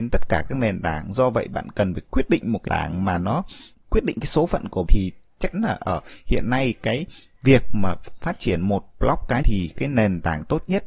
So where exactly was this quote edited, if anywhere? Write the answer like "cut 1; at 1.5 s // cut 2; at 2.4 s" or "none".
cut 1; at 2.7 s // cut 2; at 3.7 s // cut 3; at 4.9 s // cut 4; at 5.5 s // cut 5; at 9.4 s